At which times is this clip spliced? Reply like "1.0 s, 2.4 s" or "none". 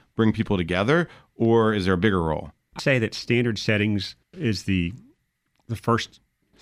2.8 s, 4.2 s